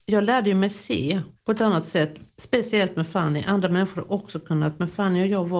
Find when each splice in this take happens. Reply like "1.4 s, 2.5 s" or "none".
1.3 s, 2.3 s